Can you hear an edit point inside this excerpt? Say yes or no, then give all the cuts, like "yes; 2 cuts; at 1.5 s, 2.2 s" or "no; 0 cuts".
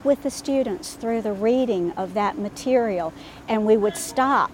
no; 0 cuts